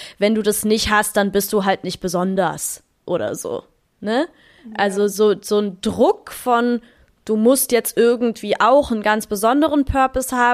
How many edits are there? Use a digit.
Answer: 0